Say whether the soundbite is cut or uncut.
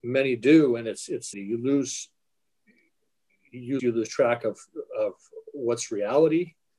cut